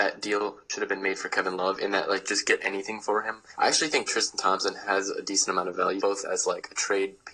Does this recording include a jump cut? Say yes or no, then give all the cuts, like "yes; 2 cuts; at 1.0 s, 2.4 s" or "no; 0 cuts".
yes; 1 cut; at 6.0 s